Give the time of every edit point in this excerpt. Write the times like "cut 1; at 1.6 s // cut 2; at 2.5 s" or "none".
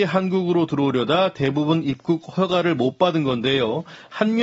none

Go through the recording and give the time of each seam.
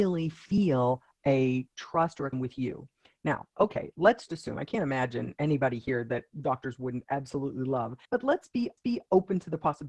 cut 1; at 2.3 s // cut 2; at 3.5 s // cut 3; at 4.3 s // cut 4; at 6.3 s // cut 5; at 8.0 s // cut 6; at 8.8 s

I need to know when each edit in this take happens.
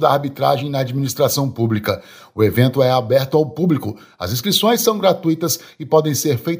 none

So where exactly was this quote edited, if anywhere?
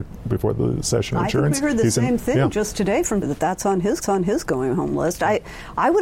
cut 1; at 3.2 s // cut 2; at 4.0 s

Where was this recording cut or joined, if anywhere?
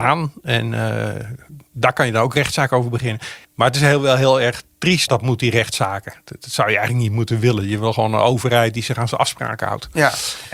cut 1; at 3.4 s // cut 2; at 5.1 s

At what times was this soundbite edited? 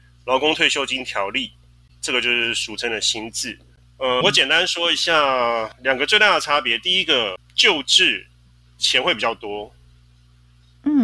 cut 1; at 4.2 s

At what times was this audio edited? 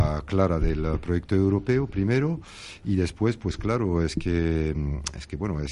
none

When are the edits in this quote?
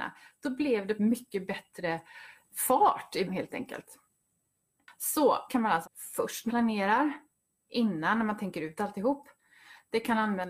cut 1; at 1.0 s // cut 2; at 2.4 s // cut 3; at 3.3 s // cut 4; at 5.5 s // cut 5; at 5.8 s // cut 6; at 6.5 s

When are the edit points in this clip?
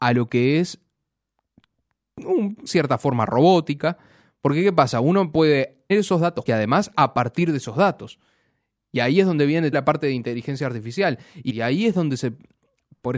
cut 1; at 2.7 s // cut 2; at 5.9 s // cut 3; at 6.5 s // cut 4; at 6.9 s // cut 5; at 9.7 s // cut 6; at 11.5 s

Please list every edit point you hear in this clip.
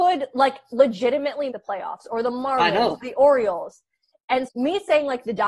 cut 1; at 1.5 s // cut 2; at 3.0 s // cut 3; at 4.5 s

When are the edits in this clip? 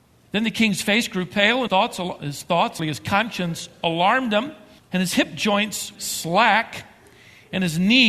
cut 1; at 1.7 s // cut 2; at 2.8 s // cut 3; at 4.8 s // cut 4; at 5.9 s

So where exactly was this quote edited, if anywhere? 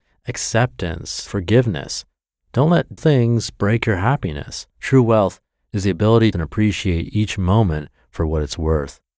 cut 1; at 1.3 s // cut 2; at 3.0 s // cut 3; at 4.7 s // cut 4; at 6.3 s

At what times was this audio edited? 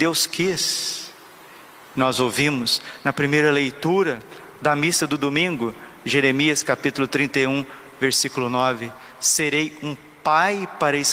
none

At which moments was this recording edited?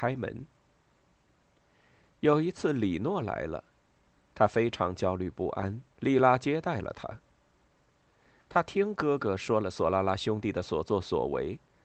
cut 1; at 5.9 s

